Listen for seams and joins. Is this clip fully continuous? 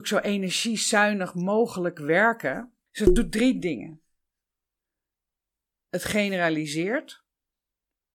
yes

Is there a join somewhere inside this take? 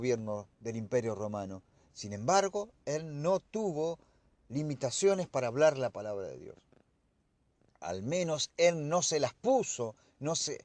no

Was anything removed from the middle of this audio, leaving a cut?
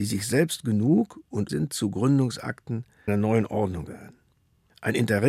yes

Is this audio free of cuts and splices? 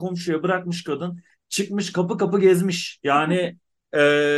yes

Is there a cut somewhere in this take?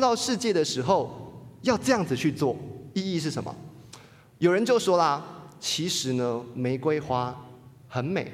no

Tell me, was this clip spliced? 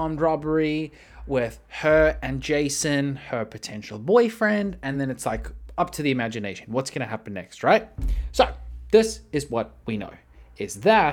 no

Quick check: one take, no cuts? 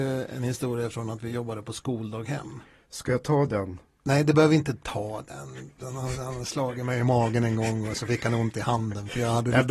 yes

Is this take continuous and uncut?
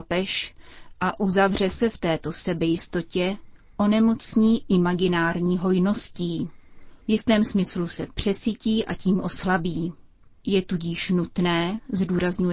yes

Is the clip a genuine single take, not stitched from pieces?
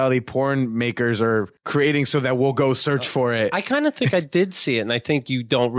no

